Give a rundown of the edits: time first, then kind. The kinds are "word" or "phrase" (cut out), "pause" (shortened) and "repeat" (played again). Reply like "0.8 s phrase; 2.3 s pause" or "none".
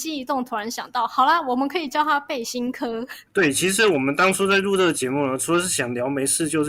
3.3 s pause